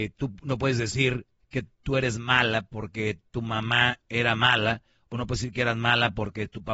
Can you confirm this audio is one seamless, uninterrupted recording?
no; 1 cut; at 1.7 s

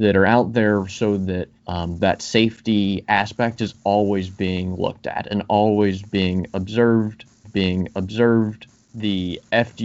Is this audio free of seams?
no; 2 cuts; at 1.6 s, 7.4 s

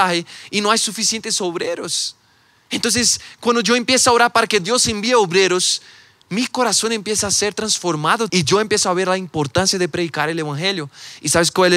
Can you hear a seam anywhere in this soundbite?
yes; 1 cut; at 8.3 s

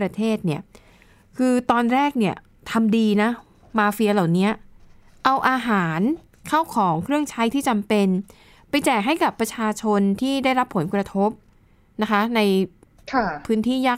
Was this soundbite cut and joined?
no; 0 cuts

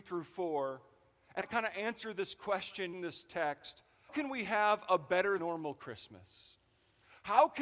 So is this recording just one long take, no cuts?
no; 4 cuts; at 1.4 s, 2.9 s, 4.1 s, 5.4 s

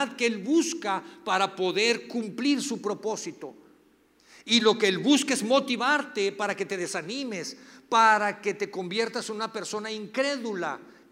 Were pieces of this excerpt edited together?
no; 0 cuts

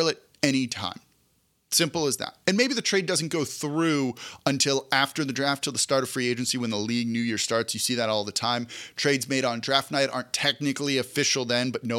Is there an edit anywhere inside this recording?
no; 0 cuts

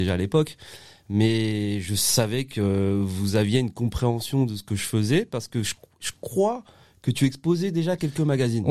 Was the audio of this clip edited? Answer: no; 0 cuts

